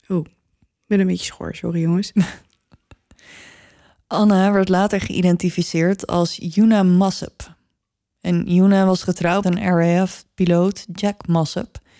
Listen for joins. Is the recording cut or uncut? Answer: cut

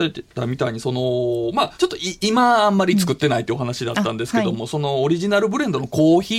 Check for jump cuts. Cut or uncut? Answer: cut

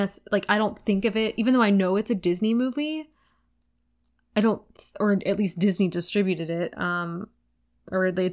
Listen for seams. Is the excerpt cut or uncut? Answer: uncut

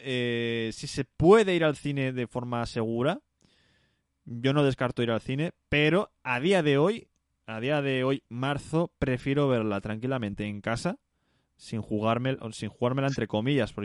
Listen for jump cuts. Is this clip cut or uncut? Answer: uncut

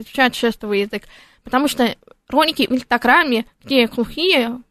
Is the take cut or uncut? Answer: uncut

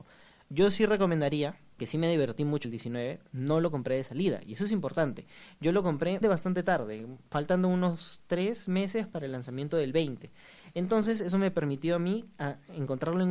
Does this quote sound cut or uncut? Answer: cut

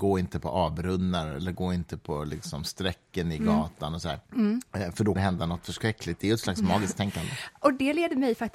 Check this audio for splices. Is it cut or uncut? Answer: cut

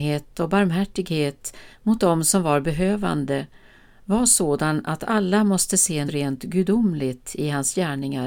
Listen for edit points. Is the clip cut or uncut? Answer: cut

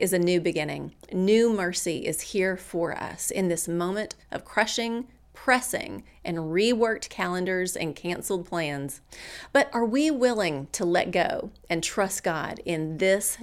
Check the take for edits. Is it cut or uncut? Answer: uncut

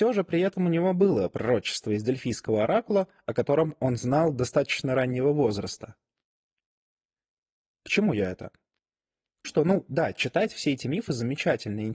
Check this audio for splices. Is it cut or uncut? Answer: cut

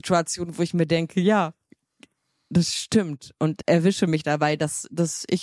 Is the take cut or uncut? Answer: cut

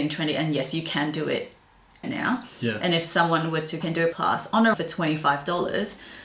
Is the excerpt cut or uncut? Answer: cut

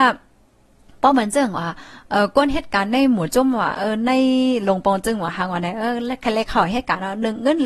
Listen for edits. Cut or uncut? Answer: uncut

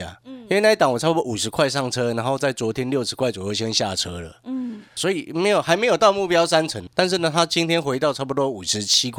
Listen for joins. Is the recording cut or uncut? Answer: cut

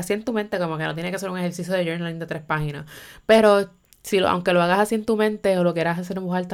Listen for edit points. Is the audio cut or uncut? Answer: uncut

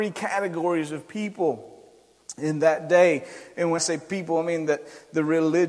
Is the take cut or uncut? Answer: cut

